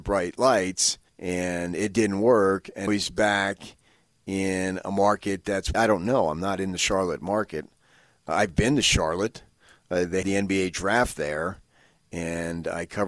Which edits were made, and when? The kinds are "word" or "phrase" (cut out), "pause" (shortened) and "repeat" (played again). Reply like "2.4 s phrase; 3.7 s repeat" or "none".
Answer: 1.1 s pause; 2.9 s word; 5.7 s word; 10.2 s word